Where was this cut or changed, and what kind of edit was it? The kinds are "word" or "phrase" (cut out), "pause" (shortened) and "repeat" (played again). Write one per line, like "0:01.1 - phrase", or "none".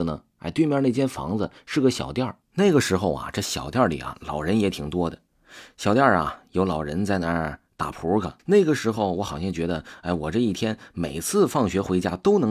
0:02.4 - pause
0:08.4 - pause